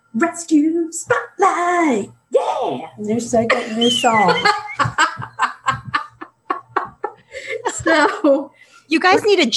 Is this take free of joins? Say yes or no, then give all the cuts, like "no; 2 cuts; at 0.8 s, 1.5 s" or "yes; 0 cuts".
yes; 0 cuts